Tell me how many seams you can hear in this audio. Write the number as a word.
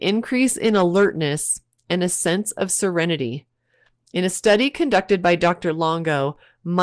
zero